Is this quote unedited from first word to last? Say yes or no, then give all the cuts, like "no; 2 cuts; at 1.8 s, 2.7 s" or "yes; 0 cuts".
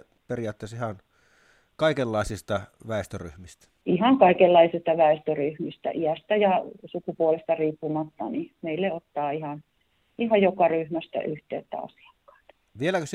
yes; 0 cuts